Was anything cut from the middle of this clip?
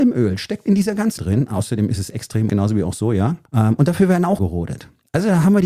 yes; 4 cuts; at 1.2 s, 2.5 s, 3.5 s, 4.4 s

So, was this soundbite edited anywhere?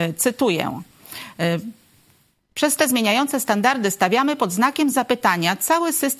no; 0 cuts

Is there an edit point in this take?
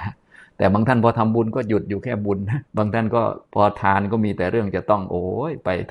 yes; 2 cuts; at 2.7 s, 3.5 s

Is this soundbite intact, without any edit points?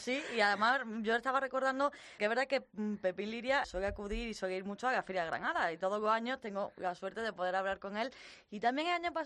no; 2 cuts; at 2.2 s, 3.6 s

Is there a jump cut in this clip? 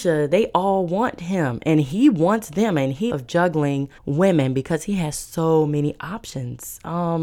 yes; 2 cuts; at 3.1 s, 4.0 s

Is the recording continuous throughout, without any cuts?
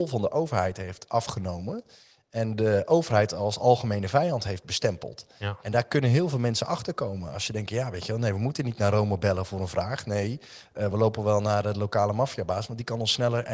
yes; 0 cuts

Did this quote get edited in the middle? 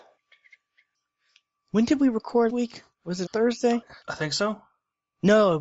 yes; 3 cuts; at 2.5 s, 3.3 s, 4.0 s

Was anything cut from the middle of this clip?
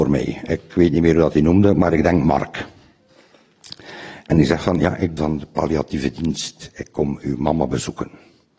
yes; 1 cut; at 5.2 s

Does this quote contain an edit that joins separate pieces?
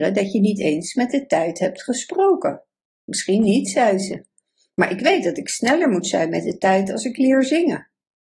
no; 0 cuts

